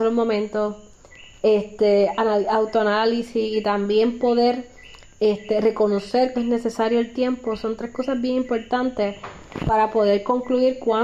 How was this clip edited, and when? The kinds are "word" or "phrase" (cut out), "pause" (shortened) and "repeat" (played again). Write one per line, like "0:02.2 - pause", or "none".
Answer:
0:06.3 - word